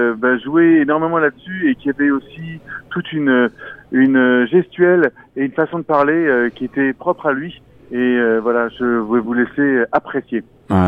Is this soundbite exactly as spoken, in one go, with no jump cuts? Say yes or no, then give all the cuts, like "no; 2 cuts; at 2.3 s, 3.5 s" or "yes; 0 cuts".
yes; 0 cuts